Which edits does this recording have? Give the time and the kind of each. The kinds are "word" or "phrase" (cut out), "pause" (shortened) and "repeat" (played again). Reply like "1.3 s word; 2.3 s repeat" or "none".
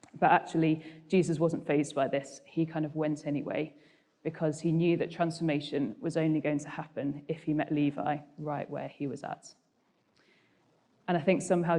none